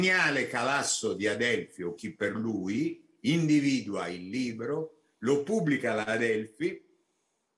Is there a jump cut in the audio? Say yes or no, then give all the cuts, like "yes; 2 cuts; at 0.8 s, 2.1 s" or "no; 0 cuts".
no; 0 cuts